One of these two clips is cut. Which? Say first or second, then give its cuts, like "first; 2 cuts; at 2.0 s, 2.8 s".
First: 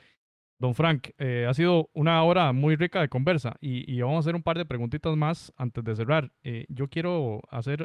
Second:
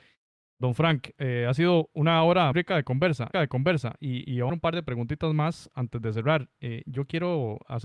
second; 3 cuts; at 2.5 s, 3.3 s, 4.5 s